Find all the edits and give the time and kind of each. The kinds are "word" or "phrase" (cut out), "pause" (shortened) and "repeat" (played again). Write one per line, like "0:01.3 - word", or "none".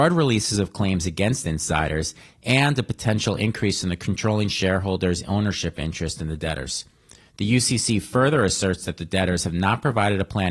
none